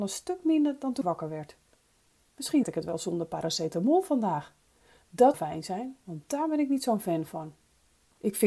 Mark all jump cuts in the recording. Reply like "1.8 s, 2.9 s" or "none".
1.0 s, 2.6 s, 5.3 s